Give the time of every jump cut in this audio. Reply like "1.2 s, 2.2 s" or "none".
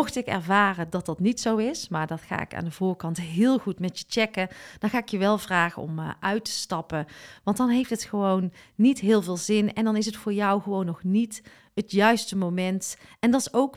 none